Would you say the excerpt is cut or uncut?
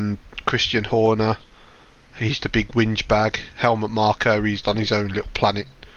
cut